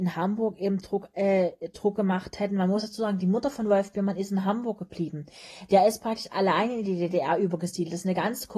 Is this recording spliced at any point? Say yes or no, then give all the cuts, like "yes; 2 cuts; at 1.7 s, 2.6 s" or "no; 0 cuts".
no; 0 cuts